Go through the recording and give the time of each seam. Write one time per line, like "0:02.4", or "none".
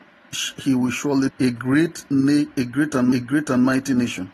0:01.3
0:03.1